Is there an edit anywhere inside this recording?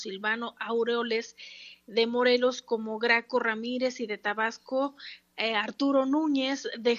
no; 0 cuts

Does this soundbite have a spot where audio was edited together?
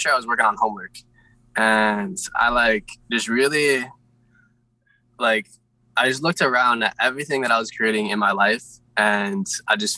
no; 0 cuts

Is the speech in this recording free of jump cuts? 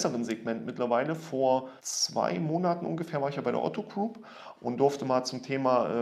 no; 1 cut; at 1.8 s

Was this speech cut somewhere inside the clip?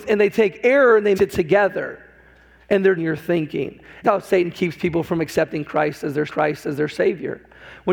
yes; 4 cuts; at 1.2 s, 3.0 s, 4.0 s, 6.3 s

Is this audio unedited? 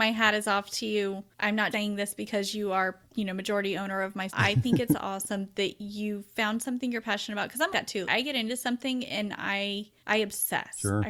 no; 7 cuts; at 1.3 s, 1.7 s, 3.1 s, 4.3 s, 7.7 s, 8.0 s, 10.0 s

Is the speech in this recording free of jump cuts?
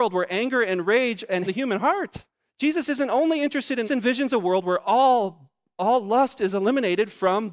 no; 3 cuts; at 1.5 s, 2.3 s, 3.8 s

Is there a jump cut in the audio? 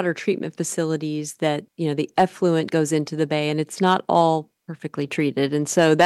yes; 2 cuts; at 1.7 s, 4.6 s

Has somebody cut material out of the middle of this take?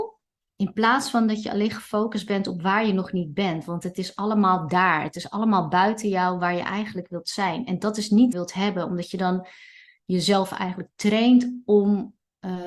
yes; 1 cut; at 8.3 s

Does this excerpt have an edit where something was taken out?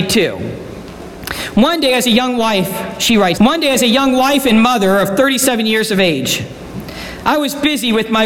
yes; 1 cut; at 3.4 s

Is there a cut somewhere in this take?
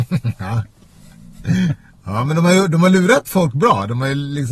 no; 0 cuts

